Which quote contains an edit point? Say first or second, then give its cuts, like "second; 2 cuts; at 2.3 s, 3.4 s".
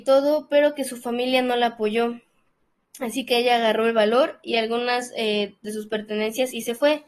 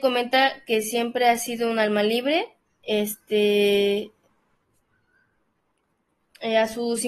second; 1 cut; at 2.6 s